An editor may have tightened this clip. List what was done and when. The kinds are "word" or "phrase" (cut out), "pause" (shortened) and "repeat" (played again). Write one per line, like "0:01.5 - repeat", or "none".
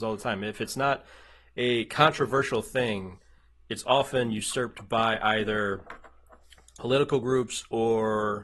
none